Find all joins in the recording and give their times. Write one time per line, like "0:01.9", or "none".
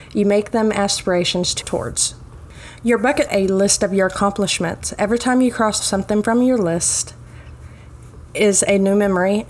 0:01.6
0:03.3
0:05.8